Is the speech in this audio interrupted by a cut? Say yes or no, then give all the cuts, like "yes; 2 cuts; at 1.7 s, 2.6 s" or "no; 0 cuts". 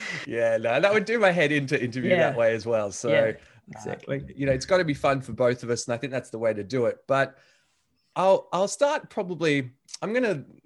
no; 0 cuts